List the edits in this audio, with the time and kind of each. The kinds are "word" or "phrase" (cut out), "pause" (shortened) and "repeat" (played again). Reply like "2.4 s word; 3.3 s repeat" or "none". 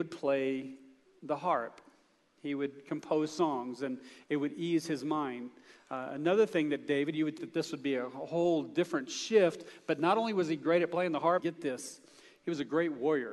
7.4 s word; 11.4 s word